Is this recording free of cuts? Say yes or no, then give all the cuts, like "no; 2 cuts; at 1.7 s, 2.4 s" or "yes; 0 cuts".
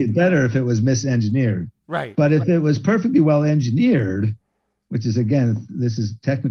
yes; 0 cuts